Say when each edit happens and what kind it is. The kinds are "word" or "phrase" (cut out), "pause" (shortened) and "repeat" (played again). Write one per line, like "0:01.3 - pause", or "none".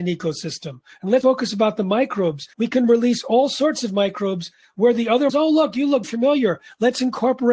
0:01.2 - word
0:02.5 - pause
0:05.3 - phrase
0:06.0 - word